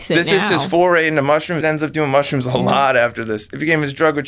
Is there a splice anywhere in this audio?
yes; 1 cut; at 1.6 s

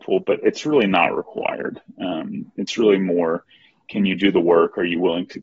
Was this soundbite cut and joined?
no; 0 cuts

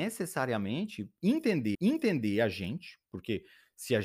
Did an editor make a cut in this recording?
yes; 1 cut; at 1.7 s

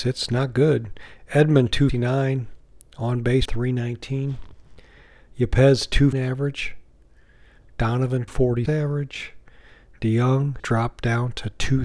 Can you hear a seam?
yes; 6 cuts; at 1.9 s, 3.5 s, 6.1 s, 8.3 s, 8.7 s, 10.6 s

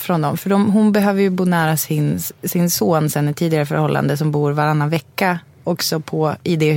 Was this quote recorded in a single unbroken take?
yes; 0 cuts

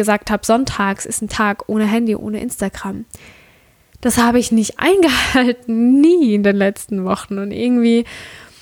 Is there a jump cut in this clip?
no; 0 cuts

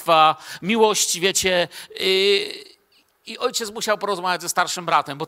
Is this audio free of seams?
yes; 0 cuts

